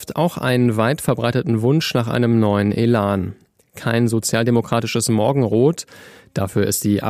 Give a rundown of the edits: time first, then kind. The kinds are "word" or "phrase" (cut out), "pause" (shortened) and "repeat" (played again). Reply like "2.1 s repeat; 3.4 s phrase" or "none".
none